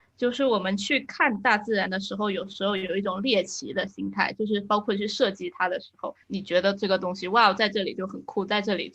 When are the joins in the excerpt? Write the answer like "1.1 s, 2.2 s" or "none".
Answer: 6.2 s